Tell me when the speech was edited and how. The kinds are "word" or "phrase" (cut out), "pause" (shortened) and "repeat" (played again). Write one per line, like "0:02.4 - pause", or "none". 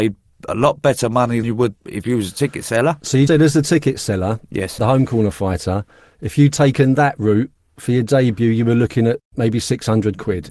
0:01.4 - word
0:01.8 - word
0:03.3 - word
0:04.8 - word